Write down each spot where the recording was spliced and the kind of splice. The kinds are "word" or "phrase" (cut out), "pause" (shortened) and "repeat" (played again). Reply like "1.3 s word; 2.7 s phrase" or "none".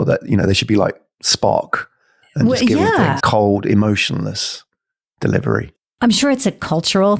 3.2 s word